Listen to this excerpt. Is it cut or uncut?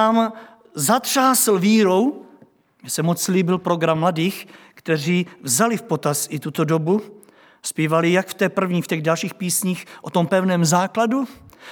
uncut